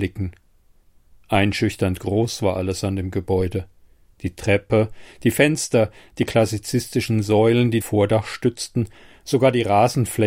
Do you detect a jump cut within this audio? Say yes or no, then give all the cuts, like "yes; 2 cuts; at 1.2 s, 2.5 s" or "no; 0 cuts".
yes; 1 cut; at 7.8 s